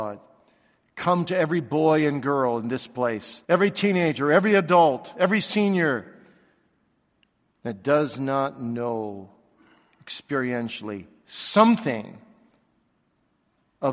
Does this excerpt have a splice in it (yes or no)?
yes